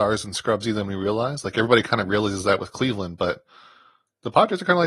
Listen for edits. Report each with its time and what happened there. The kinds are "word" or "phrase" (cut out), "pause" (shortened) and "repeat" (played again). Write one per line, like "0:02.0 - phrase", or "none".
none

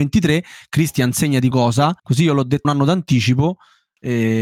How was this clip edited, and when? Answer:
0:01.5 - word
0:02.0 - pause
0:02.6 - phrase

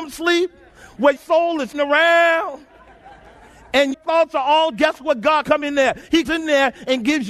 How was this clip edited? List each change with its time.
0:01.2 - word
0:01.7 - word
0:03.9 - word
0:04.7 - word
0:05.4 - word
0:06.2 - word

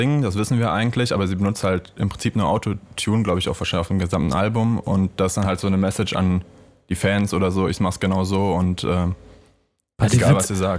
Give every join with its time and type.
none

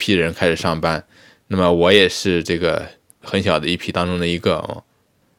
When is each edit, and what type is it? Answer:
none

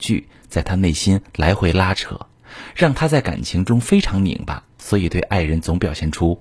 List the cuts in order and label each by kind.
0:04.7 - pause

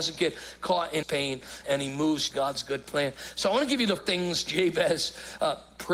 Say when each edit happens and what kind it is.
0:01.0 - word
0:01.6 - word
0:02.3 - word
0:04.0 - word

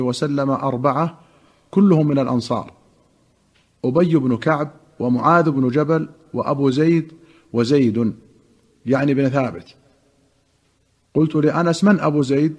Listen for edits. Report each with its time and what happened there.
none

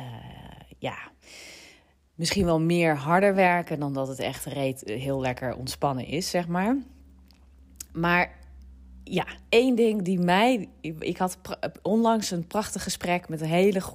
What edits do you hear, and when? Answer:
none

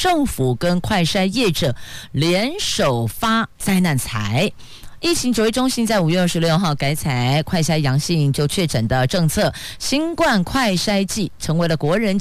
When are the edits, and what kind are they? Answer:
0:03.5 - pause

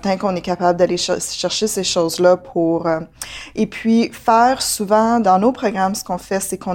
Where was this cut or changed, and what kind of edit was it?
0:05.2 - word

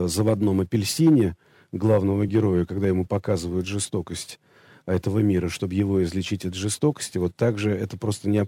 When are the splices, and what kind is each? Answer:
none

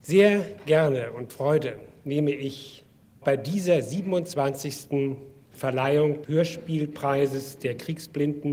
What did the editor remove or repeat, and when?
0:01.3 - word
0:03.2 - word
0:06.2 - word

